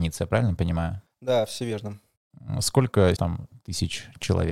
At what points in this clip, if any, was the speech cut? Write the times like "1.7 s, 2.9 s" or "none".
3.2 s